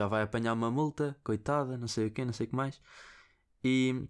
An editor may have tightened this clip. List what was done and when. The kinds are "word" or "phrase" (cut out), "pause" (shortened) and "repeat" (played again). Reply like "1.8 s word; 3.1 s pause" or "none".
none